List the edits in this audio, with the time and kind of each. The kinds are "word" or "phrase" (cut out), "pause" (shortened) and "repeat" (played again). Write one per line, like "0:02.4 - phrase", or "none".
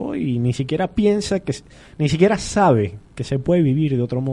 none